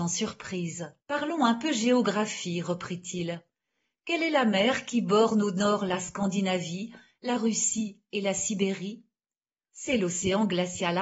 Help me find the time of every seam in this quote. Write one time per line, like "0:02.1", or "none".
0:01.0